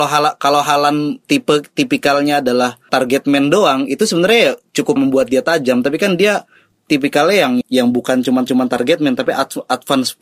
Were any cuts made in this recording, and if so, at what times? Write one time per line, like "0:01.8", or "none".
0:01.2
0:02.9
0:05.0
0:06.7
0:07.6
0:08.5

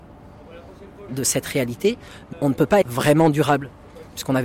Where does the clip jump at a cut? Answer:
0:01.1
0:02.3
0:02.8

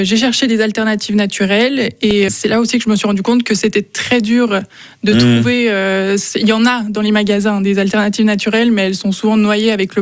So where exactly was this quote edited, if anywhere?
0:02.3

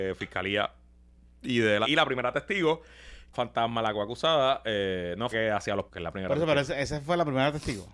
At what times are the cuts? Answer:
0:01.8
0:03.3
0:05.3
0:05.9

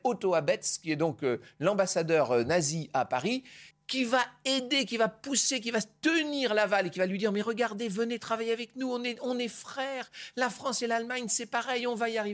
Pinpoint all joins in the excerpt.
0:03.7

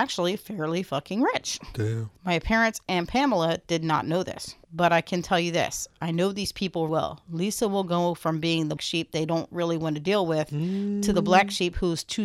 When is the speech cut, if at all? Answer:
0:02.2
0:04.6
0:06.9
0:08.8

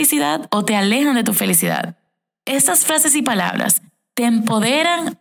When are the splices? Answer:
none

